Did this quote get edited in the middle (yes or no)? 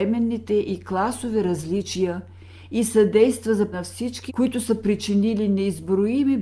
yes